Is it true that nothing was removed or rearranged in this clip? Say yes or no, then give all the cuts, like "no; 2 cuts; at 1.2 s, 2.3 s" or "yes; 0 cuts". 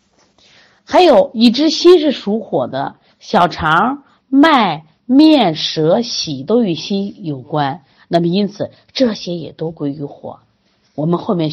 yes; 0 cuts